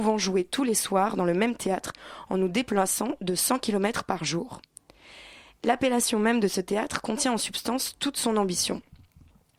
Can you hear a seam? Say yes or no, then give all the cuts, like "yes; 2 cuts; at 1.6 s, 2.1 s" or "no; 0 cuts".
no; 0 cuts